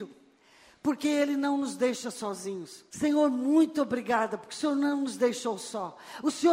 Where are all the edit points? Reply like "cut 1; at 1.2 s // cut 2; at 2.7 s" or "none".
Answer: cut 1; at 2.9 s